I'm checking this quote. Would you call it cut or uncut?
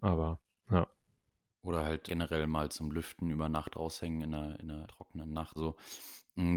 cut